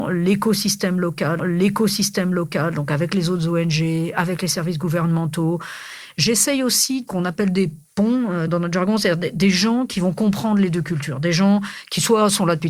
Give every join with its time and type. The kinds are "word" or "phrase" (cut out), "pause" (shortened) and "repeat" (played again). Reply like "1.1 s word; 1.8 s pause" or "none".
1.4 s repeat; 7.1 s phrase; 8.5 s word